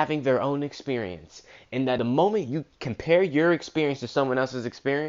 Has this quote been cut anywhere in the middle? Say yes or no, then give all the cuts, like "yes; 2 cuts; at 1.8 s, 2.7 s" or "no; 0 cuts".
yes; 1 cut; at 2.0 s